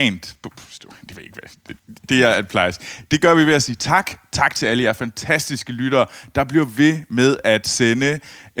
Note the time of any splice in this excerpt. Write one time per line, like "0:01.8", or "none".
0:01.8